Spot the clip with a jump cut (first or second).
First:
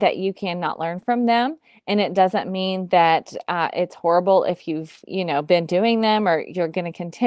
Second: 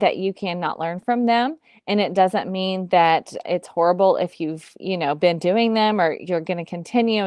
second